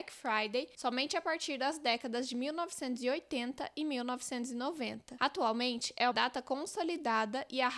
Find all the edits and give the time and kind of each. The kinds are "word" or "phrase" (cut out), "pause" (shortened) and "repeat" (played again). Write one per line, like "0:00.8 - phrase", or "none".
0:06.1 - word

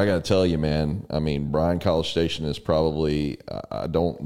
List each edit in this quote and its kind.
none

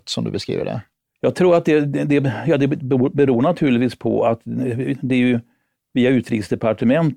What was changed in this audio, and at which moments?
none

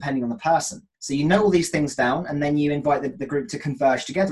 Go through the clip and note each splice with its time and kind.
0:00.9 - pause

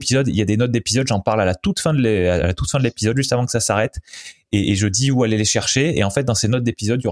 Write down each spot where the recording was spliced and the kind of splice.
none

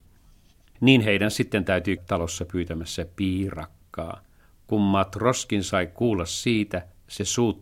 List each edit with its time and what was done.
0:02.0 - word

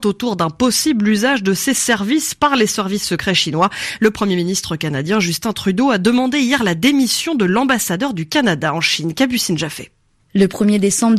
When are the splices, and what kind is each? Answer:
none

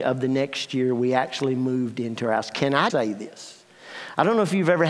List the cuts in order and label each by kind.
0:02.9 - word

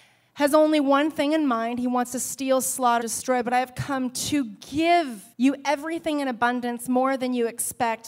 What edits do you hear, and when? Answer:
0:03.0 - word
0:05.3 - pause

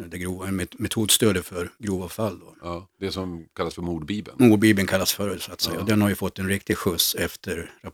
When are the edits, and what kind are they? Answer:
0:01.7 - pause

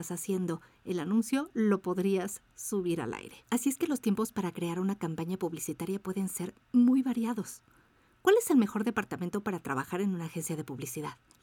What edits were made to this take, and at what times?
none

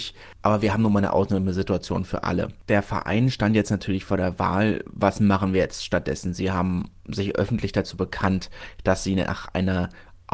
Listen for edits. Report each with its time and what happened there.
none

